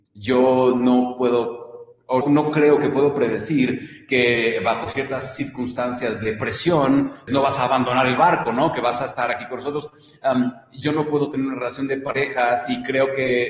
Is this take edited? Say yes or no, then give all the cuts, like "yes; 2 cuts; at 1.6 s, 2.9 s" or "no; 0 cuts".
yes; 2 cuts; at 2.2 s, 7.3 s